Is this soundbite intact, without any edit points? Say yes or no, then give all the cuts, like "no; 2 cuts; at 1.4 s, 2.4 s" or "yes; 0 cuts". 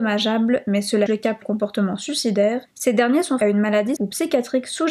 no; 5 cuts; at 1.1 s, 1.4 s, 2.7 s, 3.4 s, 4.0 s